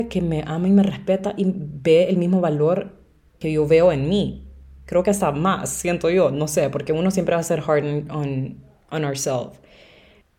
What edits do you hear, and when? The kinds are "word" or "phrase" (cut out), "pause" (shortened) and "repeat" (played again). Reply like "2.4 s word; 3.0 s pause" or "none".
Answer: none